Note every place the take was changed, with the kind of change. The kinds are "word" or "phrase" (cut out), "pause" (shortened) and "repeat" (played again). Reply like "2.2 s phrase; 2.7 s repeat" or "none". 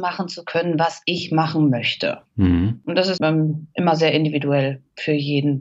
3.2 s word